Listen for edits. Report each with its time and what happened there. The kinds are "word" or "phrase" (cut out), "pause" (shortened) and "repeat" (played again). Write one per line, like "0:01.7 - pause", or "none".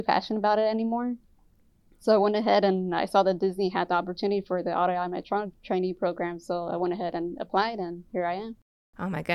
0:08.1 - pause